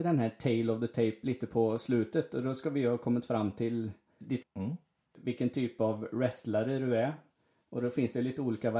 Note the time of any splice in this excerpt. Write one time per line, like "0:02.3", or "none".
0:04.4